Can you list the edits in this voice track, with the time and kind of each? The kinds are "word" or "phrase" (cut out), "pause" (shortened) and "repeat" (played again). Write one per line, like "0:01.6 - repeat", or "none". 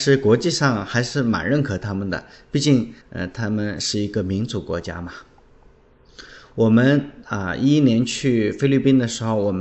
0:03.0 - pause